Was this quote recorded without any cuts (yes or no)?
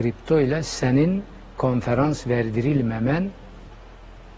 yes